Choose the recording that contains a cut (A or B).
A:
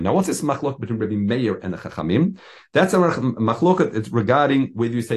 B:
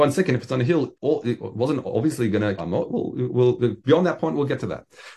B